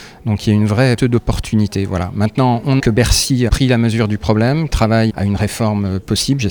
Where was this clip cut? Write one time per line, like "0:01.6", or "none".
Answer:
0:01.0
0:02.8
0:03.5
0:04.7
0:05.1

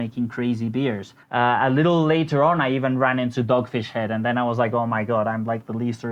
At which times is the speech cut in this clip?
0:01.2

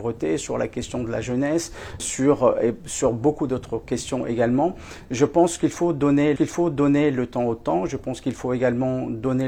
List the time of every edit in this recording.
0:02.0
0:06.4

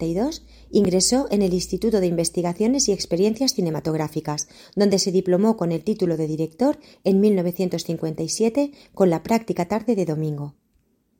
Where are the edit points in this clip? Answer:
none

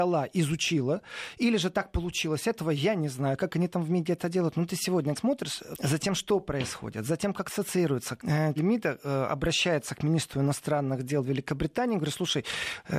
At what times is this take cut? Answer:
0:05.2
0:05.7
0:08.2
0:08.6

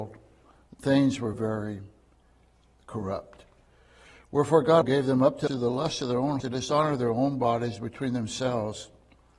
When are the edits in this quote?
0:01.3
0:04.8
0:05.5
0:06.4

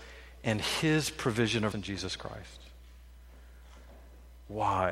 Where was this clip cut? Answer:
0:01.7

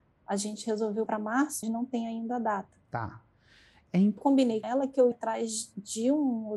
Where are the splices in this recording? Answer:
0:01.1
0:01.6
0:02.8
0:04.2
0:04.6
0:05.1

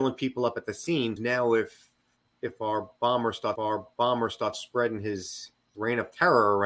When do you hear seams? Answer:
0:01.2
0:03.6
0:05.7

